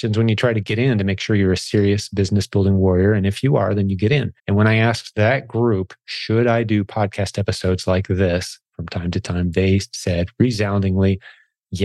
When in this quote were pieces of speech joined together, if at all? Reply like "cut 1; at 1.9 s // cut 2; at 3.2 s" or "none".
cut 1; at 4.4 s